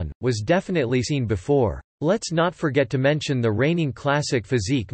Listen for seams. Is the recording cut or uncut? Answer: cut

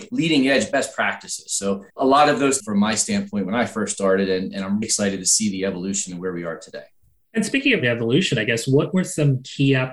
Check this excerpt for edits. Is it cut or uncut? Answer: cut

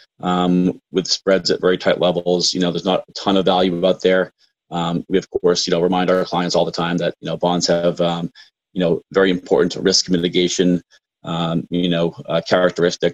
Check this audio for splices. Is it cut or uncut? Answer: uncut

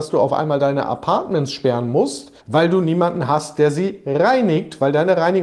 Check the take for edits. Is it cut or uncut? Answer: cut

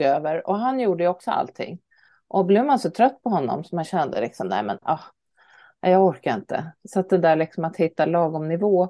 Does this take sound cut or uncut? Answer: uncut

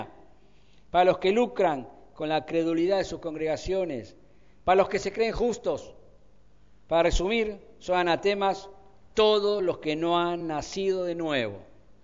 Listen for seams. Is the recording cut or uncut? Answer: uncut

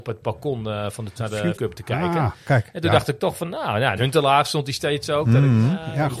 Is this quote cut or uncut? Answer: cut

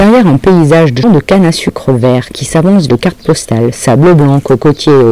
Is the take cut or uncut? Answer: cut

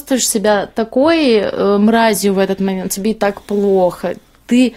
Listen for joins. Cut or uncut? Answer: uncut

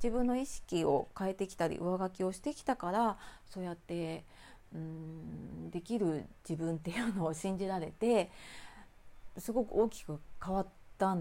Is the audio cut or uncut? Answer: cut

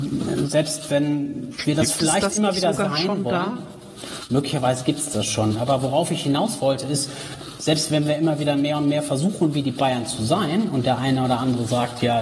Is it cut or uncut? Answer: uncut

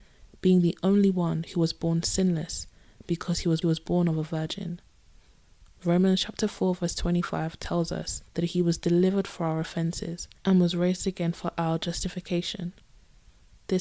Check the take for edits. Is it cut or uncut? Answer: cut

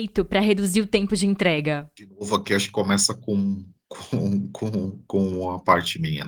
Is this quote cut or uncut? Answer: uncut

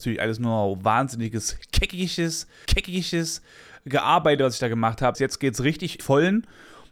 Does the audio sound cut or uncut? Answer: cut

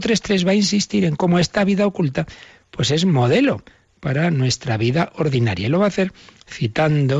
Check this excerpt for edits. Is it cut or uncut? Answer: uncut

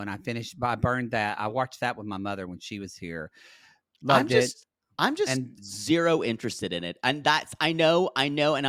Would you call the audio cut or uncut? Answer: uncut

